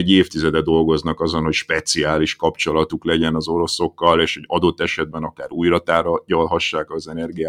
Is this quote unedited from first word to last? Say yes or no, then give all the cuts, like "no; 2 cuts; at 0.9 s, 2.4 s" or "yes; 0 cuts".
yes; 0 cuts